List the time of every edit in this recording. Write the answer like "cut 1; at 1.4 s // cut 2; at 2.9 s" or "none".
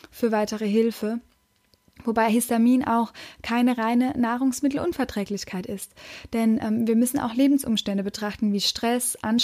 none